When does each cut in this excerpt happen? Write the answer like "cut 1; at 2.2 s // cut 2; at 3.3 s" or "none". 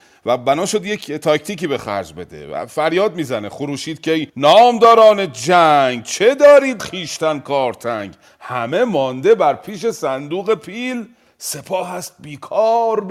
cut 1; at 4.3 s // cut 2; at 6.8 s